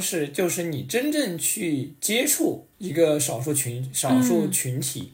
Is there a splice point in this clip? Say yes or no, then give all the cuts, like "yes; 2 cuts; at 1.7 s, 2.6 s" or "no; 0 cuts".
yes; 1 cut; at 2.7 s